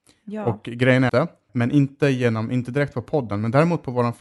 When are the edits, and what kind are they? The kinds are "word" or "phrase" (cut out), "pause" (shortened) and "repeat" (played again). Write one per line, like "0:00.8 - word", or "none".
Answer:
0:01.1 - phrase
0:01.5 - word

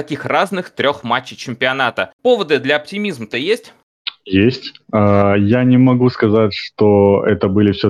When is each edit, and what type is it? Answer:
none

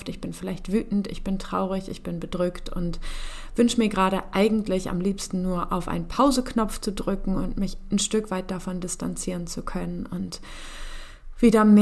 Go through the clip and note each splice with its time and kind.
none

